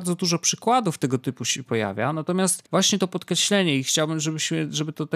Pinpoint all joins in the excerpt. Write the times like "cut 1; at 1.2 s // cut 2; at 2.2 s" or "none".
cut 1; at 2.7 s